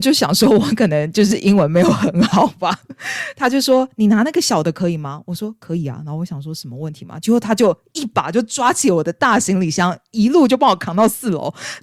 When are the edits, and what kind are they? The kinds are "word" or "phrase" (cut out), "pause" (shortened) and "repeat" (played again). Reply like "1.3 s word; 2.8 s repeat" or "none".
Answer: none